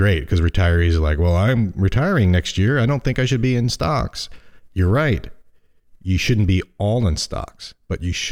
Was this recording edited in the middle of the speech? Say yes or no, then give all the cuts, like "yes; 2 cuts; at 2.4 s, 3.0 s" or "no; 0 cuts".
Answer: no; 0 cuts